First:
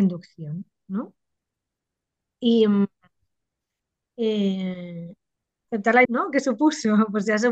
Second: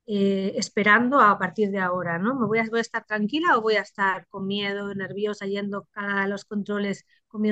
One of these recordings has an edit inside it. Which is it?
first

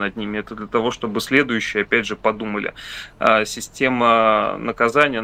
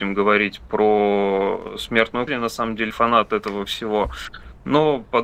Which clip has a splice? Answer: second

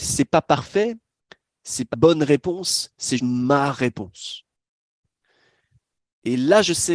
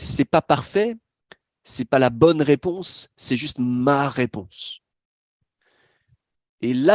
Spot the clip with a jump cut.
first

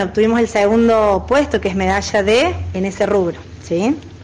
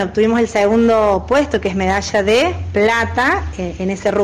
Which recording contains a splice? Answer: first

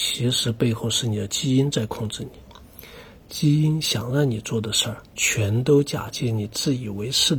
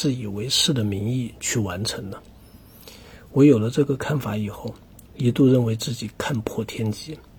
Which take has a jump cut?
first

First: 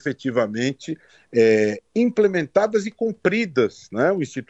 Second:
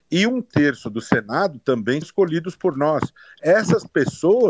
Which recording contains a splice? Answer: second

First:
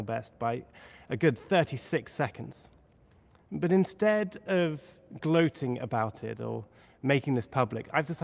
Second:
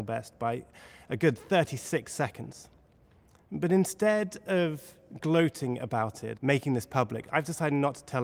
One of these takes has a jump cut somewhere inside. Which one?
second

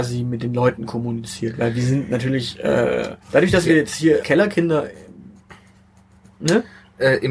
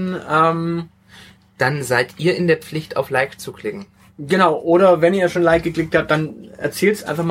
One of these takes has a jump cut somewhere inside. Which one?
first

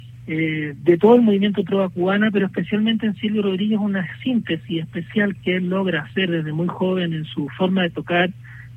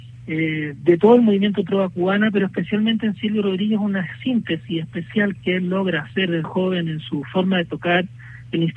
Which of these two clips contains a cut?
second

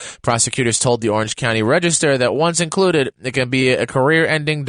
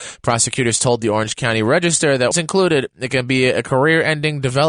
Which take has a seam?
second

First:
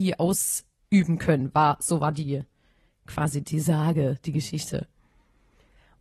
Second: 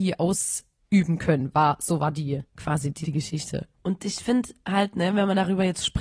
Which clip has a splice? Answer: second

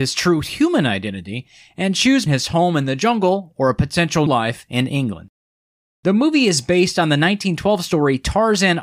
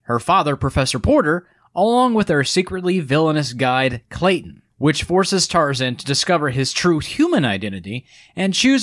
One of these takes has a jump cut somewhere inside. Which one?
first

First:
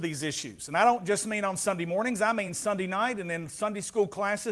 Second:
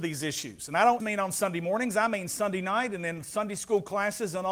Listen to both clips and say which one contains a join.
second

